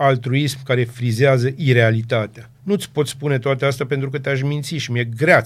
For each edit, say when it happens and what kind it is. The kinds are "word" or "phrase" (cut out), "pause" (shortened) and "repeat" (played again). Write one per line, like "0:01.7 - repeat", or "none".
0:02.5 - pause

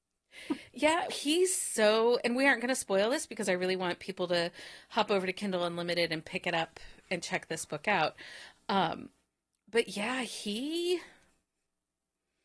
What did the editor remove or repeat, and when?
0:01.1 - word

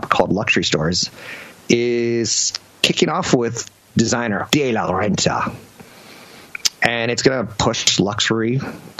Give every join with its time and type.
0:04.5 - word

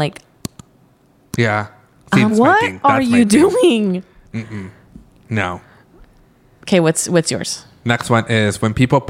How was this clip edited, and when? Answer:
0:02.3 - word

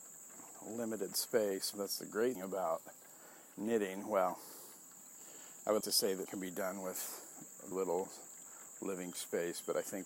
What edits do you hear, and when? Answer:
0:01.7 - word
0:02.4 - word
0:05.8 - word
0:06.3 - word
0:07.7 - word
0:09.1 - word

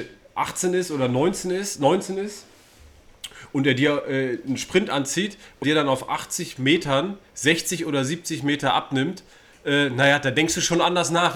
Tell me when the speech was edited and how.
0:05.6 - word

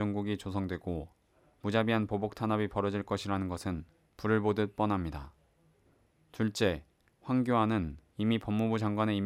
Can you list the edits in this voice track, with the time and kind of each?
none

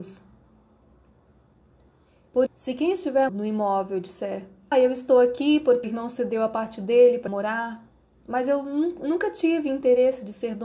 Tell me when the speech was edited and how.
0:02.5 - word
0:03.3 - word
0:04.7 - word
0:05.8 - word
0:07.3 - word

